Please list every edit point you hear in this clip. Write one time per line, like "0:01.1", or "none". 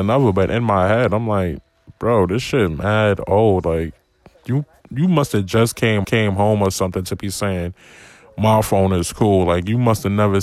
0:06.0